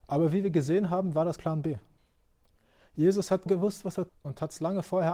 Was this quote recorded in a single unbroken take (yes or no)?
no